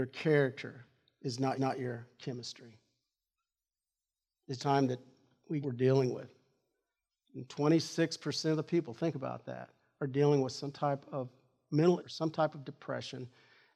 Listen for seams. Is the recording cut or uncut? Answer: cut